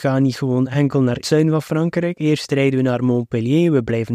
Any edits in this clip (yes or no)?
yes